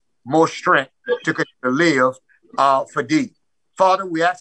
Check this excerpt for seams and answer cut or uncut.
cut